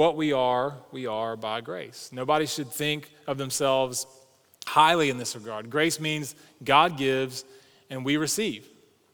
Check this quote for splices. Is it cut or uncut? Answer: uncut